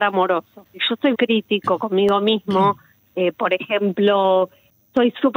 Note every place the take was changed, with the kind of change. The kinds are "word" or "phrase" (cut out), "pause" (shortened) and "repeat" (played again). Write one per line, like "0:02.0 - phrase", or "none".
0:01.1 - word